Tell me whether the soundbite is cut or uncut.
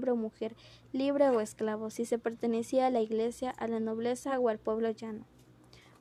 uncut